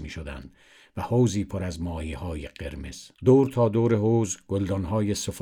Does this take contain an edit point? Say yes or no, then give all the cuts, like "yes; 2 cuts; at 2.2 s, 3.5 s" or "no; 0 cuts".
yes; 1 cut; at 3.1 s